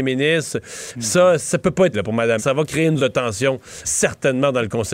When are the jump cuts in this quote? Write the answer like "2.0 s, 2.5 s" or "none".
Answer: 1.9 s, 2.4 s, 3.0 s, 3.8 s